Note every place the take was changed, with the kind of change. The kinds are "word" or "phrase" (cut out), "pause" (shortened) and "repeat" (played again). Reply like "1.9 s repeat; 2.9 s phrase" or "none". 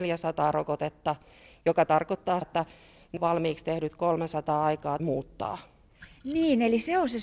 2.4 s word; 3.2 s word; 5.0 s word